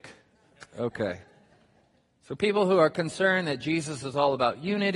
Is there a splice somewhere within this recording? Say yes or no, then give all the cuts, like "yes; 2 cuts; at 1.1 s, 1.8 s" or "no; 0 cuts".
no; 0 cuts